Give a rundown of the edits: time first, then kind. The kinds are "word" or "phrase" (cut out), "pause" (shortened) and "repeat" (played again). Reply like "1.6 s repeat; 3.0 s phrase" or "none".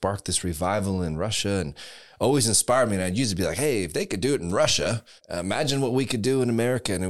5.2 s pause

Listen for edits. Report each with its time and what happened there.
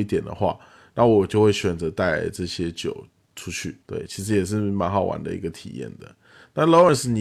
3.8 s pause

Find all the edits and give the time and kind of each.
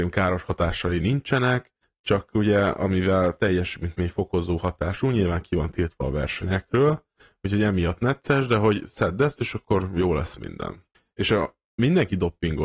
none

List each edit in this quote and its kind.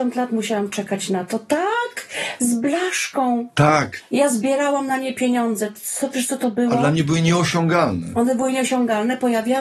none

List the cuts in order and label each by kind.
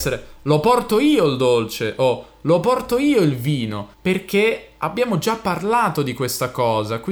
3.9 s pause

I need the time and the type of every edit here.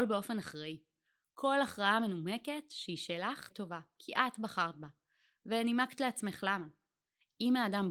3.5 s word

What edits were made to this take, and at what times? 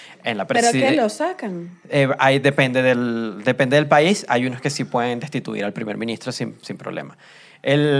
none

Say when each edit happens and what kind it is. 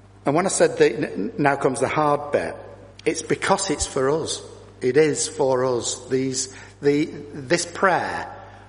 2.9 s pause

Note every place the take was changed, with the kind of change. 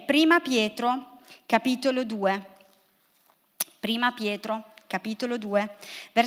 none

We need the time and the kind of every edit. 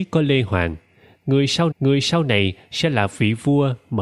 1.7 s repeat

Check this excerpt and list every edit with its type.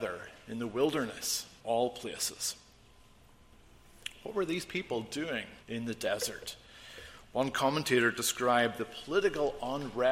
1.6 s word; 5.6 s pause

